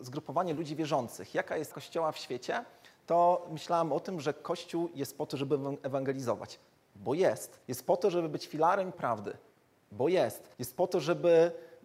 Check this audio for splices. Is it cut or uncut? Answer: cut